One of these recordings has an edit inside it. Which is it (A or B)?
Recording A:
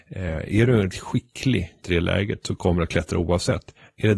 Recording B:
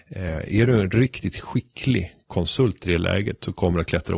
A